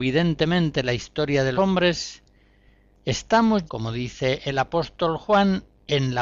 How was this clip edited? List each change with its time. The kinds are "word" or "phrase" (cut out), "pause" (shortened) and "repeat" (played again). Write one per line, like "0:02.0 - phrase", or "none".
0:01.5 - word
0:03.7 - word